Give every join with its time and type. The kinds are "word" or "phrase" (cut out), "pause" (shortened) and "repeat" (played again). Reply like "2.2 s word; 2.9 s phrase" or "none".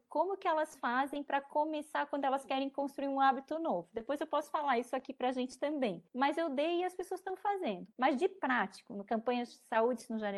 6.1 s pause; 7.9 s pause